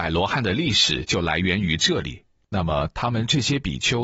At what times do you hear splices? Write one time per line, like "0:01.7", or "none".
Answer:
none

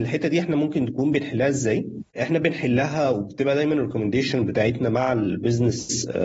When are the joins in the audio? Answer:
0:02.1

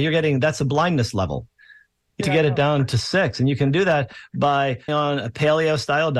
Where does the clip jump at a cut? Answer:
0:02.2
0:04.9

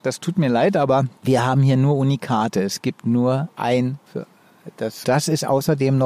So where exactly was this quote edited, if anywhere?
0:01.2
0:04.1
0:05.0

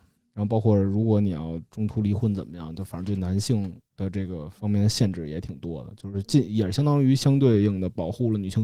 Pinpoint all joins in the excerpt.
0:03.9
0:04.6

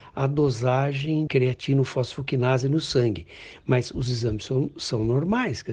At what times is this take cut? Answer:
0:01.3

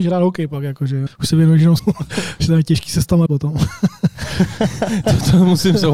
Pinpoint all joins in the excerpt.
0:01.1
0:01.8
0:03.3

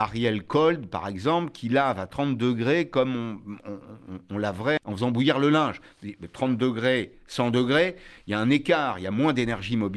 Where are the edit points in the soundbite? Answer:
0:04.8

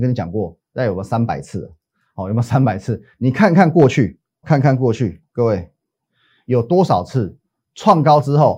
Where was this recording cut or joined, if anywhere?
0:04.4

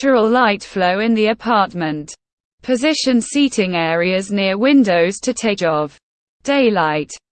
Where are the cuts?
0:05.6

